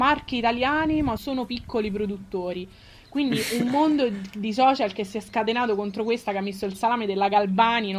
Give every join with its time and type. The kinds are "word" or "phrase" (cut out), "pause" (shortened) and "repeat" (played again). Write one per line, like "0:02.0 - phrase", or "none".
0:01.2 - phrase